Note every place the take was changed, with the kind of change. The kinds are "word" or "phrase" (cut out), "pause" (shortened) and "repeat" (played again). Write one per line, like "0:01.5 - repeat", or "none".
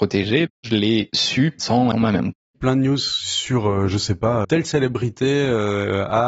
0:01.9 - phrase
0:04.4 - word